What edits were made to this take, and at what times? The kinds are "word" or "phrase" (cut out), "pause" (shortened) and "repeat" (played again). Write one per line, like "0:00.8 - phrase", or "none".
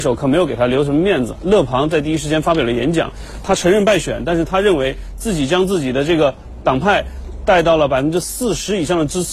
0:03.4 - phrase